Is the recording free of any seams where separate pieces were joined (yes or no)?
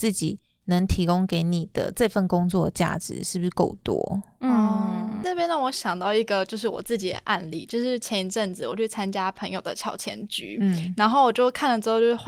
yes